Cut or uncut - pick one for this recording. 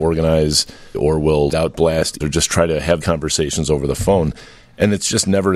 cut